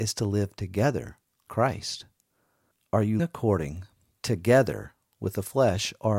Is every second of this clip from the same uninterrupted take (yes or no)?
no